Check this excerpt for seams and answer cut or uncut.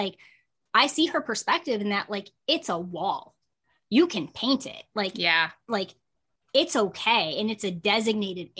uncut